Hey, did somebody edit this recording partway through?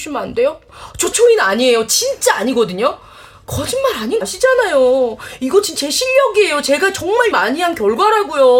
yes; 4 cuts; at 1.1 s, 4.2 s, 5.8 s, 7.3 s

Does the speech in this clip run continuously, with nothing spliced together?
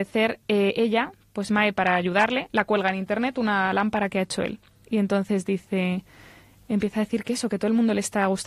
yes; 0 cuts

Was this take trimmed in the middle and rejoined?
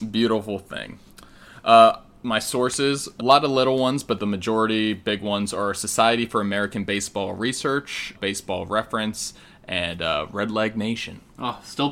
yes; 2 cuts; at 3.2 s, 8.1 s

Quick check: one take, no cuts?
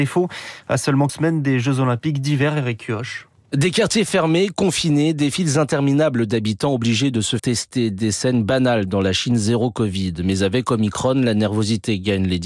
no; 2 cuts; at 1.1 s, 7.4 s

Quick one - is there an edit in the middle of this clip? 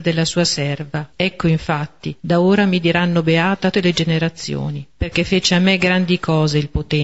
yes; 4 cuts; at 1.1 s, 2.2 s, 3.7 s, 4.9 s

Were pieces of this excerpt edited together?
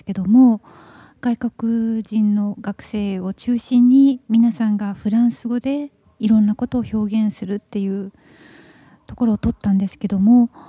no; 0 cuts

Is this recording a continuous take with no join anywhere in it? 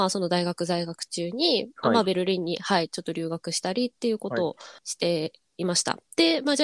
no; 1 cut; at 4.8 s

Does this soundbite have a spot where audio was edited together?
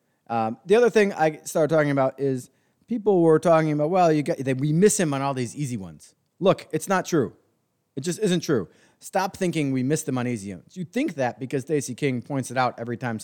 no; 0 cuts

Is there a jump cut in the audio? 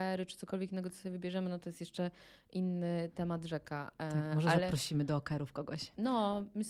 no; 0 cuts

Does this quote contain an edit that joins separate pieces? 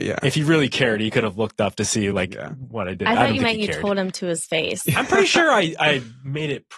no; 0 cuts

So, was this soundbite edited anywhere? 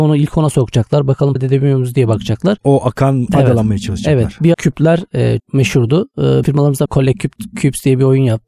yes; 6 cuts; at 1.4 s, 3.3 s, 4.5 s, 5.4 s, 6.4 s, 6.8 s

